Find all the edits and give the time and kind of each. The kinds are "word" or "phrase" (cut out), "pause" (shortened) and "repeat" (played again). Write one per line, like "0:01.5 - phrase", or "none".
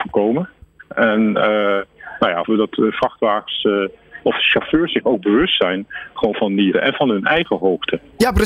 0:02.4 - word
0:06.7 - word